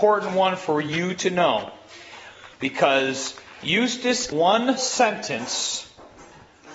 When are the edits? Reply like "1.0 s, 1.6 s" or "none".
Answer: 2.5 s, 4.3 s, 4.8 s